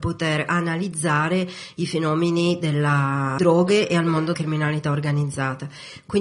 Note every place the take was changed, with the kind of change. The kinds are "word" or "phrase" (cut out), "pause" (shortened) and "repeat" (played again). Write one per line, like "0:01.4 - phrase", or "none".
0:03.4 - phrase
0:04.3 - word